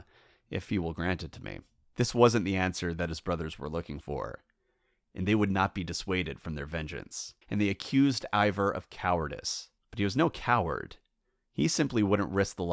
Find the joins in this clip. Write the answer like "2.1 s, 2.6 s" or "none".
1.8 s, 7.4 s, 9.8 s